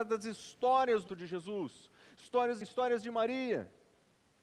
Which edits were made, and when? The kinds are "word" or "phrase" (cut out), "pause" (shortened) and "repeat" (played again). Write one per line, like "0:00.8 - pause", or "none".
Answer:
0:01.1 - word
0:02.6 - phrase